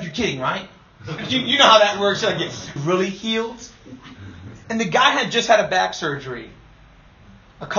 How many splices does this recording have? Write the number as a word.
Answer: one